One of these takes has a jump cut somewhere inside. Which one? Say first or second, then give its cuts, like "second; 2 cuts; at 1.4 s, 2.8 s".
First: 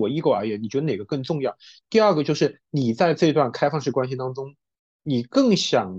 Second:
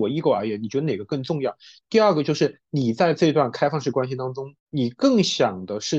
second; 1 cut; at 4.6 s